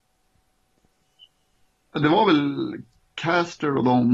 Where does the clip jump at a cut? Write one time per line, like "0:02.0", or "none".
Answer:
0:03.0